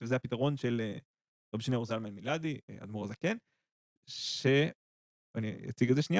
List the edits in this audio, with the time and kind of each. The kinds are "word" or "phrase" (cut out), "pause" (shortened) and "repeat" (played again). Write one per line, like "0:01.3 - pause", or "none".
none